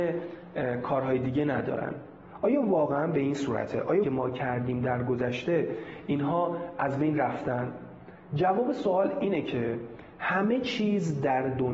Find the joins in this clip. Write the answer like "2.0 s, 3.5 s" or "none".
4.0 s